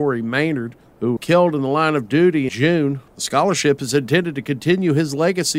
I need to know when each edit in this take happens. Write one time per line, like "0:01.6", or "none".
0:01.2
0:02.5
0:03.1